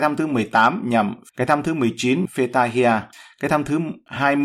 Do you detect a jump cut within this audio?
yes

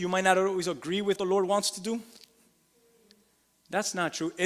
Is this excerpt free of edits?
no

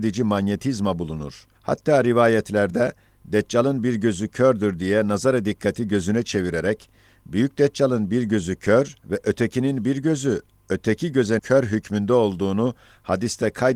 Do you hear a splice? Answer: yes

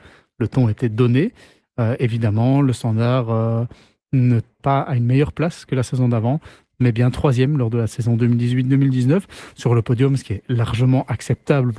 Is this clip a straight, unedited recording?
no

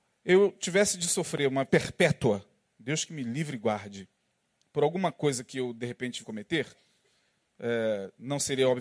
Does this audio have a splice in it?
yes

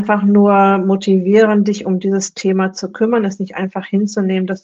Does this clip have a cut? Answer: no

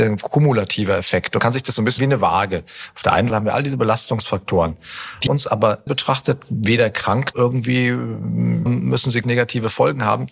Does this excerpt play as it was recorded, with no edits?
no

